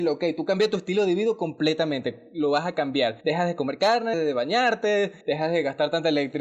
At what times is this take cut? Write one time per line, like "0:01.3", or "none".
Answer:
0:03.2
0:04.1
0:05.2